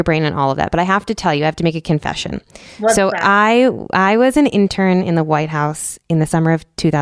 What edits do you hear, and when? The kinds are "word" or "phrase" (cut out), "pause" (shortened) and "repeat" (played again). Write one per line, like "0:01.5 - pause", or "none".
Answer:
none